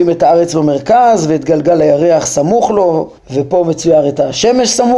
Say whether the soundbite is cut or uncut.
cut